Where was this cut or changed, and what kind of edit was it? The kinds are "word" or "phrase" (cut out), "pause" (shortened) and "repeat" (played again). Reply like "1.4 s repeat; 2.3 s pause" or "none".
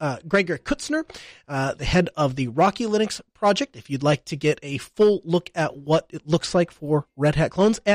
none